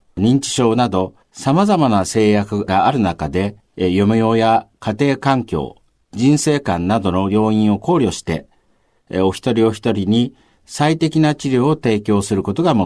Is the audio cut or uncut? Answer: cut